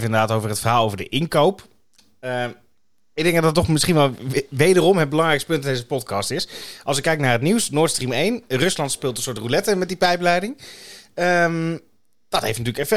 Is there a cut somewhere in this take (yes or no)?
no